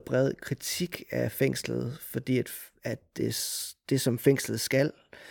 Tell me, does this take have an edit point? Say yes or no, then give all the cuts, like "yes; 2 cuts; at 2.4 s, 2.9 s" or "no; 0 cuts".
no; 0 cuts